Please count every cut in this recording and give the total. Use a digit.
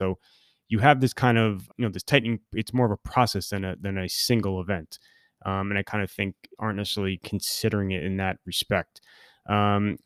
2